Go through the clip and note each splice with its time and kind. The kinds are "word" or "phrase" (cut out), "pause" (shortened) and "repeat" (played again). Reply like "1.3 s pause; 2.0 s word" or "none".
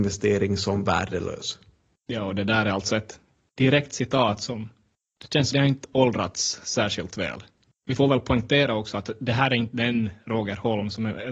5.5 s word